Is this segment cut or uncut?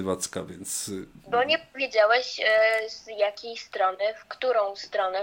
uncut